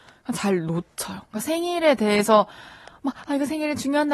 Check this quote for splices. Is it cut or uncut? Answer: uncut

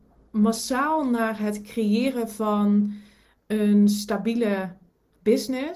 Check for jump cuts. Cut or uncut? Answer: uncut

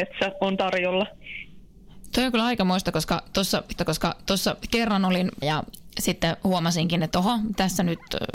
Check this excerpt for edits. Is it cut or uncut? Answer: cut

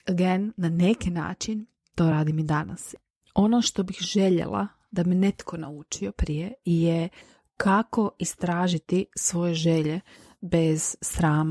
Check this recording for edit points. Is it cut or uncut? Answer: uncut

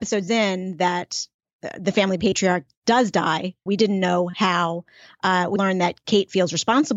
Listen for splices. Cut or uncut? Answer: cut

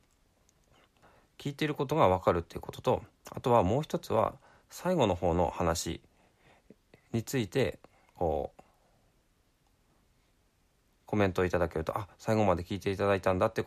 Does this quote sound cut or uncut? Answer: uncut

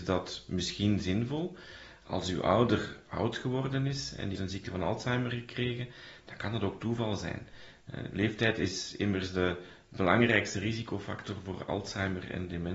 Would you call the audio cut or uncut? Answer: cut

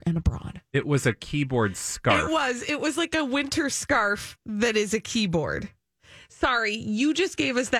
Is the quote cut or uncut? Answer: uncut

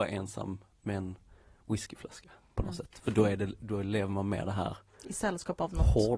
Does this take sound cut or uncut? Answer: uncut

